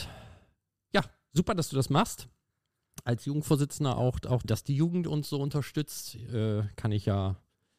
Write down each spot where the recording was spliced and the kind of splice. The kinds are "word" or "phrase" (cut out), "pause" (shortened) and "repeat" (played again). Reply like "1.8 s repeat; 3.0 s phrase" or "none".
4.4 s phrase